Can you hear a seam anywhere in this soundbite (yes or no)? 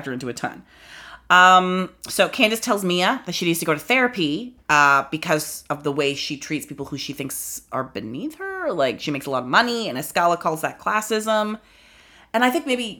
yes